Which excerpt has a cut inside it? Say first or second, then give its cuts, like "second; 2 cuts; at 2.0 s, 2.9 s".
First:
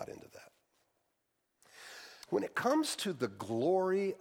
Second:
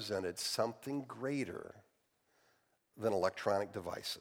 first; 1 cut; at 2.2 s